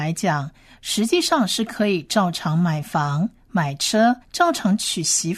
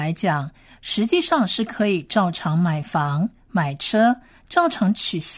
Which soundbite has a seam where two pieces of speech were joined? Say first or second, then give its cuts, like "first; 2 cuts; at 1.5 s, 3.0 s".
first; 1 cut; at 4.2 s